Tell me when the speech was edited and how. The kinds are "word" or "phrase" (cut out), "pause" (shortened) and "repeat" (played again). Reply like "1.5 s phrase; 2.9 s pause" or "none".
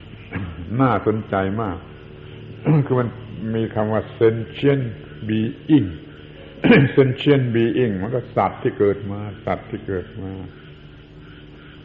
none